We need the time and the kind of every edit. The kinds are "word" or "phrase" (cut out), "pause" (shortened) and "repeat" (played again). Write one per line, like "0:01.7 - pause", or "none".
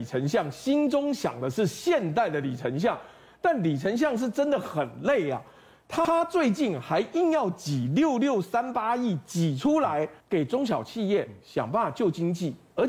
0:10.2 - pause